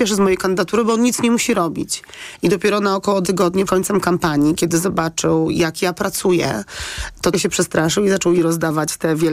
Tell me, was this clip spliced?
yes; 4 cuts; at 3.2 s, 3.7 s, 7.3 s, 8.4 s

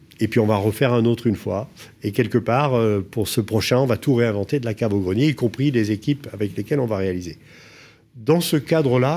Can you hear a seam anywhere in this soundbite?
no; 0 cuts

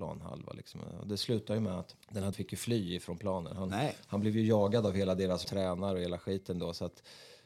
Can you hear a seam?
yes; 3 cuts; at 2.0 s, 2.3 s, 5.4 s

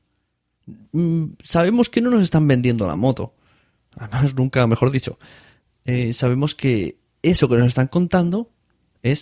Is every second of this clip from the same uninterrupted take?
yes; 0 cuts

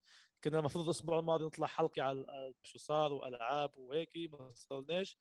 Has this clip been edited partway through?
yes; 2 cuts; at 1.9 s, 2.6 s

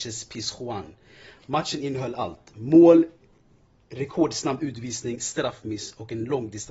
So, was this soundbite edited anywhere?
no; 0 cuts

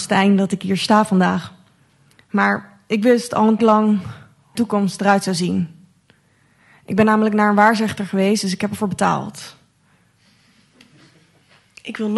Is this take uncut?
no; 2 cuts; at 3.6 s, 4.5 s

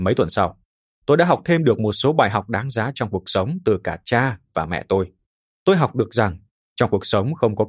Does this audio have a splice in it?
no; 0 cuts

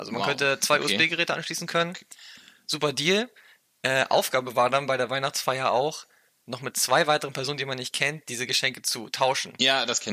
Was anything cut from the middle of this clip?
no; 0 cuts

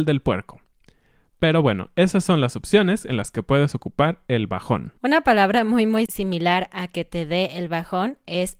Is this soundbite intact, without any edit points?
no; 1 cut; at 5.0 s

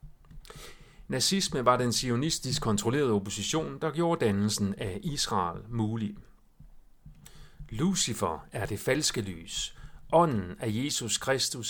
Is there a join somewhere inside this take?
no; 0 cuts

